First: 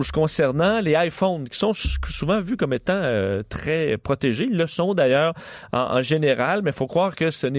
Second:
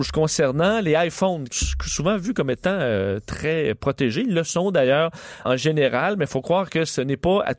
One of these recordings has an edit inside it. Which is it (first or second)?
second